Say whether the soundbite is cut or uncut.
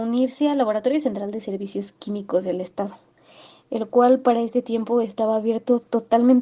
uncut